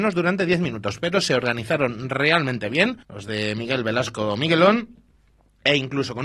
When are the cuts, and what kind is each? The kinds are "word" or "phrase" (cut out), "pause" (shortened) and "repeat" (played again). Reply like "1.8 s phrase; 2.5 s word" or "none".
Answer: 3.0 s pause